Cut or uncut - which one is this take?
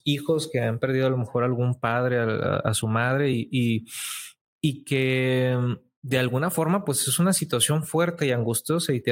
uncut